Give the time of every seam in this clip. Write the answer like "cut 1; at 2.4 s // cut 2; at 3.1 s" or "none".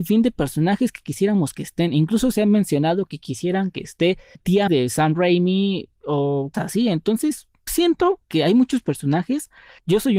cut 1; at 4.4 s // cut 2; at 4.7 s // cut 3; at 6.5 s // cut 4; at 7.7 s